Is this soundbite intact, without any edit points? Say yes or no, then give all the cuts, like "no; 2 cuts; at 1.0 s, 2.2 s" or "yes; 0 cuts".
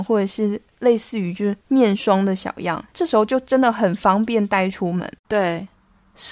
no; 3 cuts; at 1.6 s, 2.9 s, 5.2 s